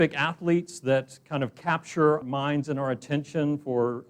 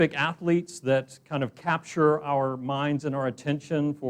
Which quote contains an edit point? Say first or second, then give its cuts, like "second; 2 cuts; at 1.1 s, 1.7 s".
first; 1 cut; at 2.2 s